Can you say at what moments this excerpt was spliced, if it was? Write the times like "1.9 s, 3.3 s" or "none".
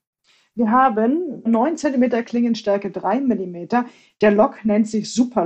1.5 s, 2.2 s